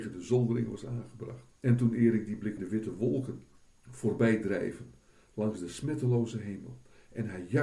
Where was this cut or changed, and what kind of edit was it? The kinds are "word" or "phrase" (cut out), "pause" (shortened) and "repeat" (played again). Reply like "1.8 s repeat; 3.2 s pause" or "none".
1.6 s pause; 2.6 s phrase; 3.7 s pause